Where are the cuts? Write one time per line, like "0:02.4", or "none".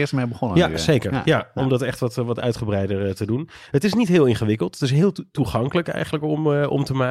none

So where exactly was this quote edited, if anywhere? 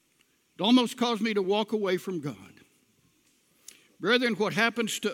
none

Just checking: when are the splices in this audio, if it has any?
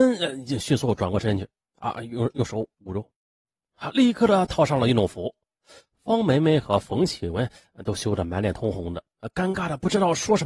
none

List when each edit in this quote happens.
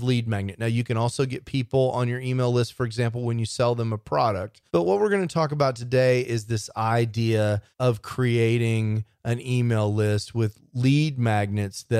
0:04.7
0:07.7

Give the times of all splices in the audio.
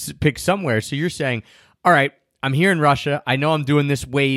none

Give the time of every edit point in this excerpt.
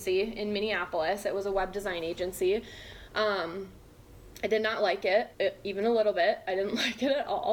0:05.3

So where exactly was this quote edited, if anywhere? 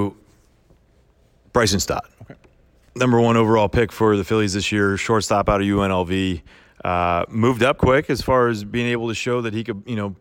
0:07.8

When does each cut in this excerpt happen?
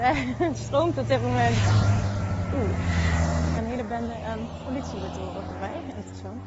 0:03.6

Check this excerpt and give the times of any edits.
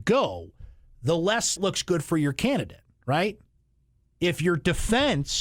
0:01.6
0:03.6

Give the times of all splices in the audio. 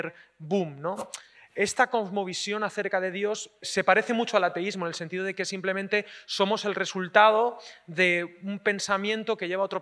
0:03.6

